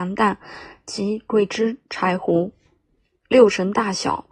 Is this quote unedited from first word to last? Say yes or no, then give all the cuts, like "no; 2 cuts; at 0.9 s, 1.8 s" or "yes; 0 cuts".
yes; 0 cuts